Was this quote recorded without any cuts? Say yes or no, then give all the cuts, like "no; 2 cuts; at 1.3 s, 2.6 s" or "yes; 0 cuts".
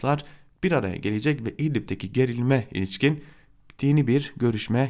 yes; 0 cuts